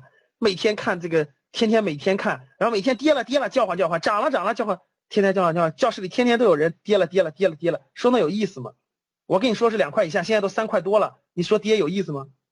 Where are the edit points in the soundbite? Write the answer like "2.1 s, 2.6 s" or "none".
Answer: none